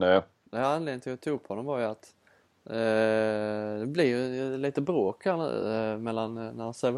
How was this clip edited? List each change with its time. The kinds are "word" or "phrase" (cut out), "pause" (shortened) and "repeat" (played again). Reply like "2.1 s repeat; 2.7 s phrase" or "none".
none